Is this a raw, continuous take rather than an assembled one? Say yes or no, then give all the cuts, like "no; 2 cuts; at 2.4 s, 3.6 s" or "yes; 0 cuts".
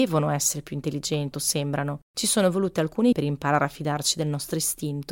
no; 3 cuts; at 1.3 s, 2.0 s, 3.1 s